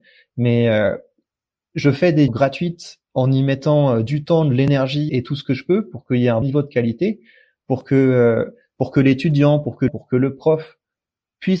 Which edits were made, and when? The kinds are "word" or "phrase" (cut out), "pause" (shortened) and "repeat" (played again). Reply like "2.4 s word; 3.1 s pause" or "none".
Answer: 2.3 s word; 5.1 s word; 6.4 s word; 9.9 s word